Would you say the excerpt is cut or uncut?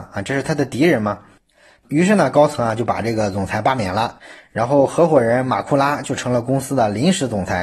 uncut